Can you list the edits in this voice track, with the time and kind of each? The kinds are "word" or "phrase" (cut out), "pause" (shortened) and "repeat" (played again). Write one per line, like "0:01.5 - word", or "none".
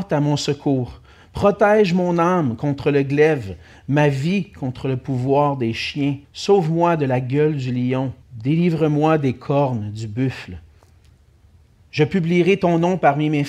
0:06.2 - pause
0:08.2 - pause